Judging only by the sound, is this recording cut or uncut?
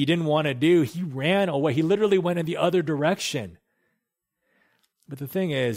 uncut